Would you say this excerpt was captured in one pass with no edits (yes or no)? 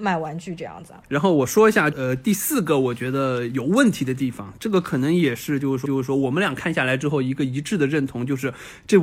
no